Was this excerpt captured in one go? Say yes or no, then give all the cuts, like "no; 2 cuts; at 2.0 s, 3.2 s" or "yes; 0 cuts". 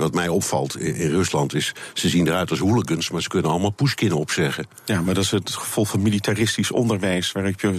yes; 0 cuts